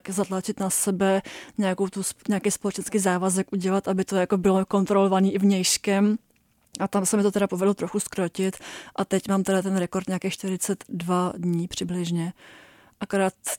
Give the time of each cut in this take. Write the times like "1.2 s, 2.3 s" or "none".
none